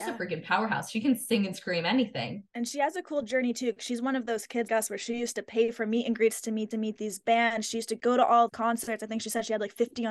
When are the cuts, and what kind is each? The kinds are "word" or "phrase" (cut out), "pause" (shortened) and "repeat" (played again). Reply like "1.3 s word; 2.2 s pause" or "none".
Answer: 2.5 s pause; 4.7 s word; 6.7 s repeat; 8.5 s word